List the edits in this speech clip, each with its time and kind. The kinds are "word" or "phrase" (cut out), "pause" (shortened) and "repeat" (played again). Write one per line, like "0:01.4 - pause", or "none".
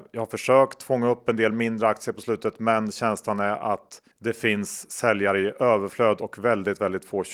0:04.1 - pause